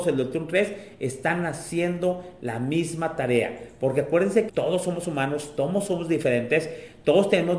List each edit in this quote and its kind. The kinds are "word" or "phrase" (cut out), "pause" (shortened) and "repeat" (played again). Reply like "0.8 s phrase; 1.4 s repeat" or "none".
4.5 s word